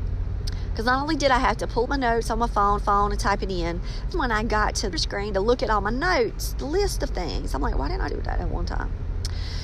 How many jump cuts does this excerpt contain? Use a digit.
6